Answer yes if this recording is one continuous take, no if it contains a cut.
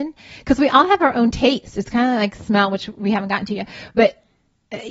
yes